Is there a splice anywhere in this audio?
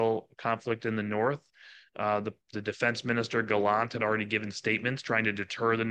no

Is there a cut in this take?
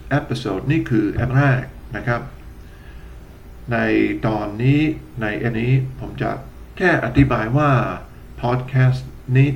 yes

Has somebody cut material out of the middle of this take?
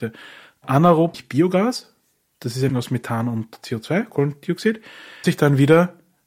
yes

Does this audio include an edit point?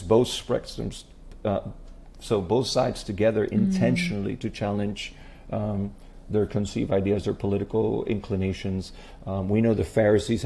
no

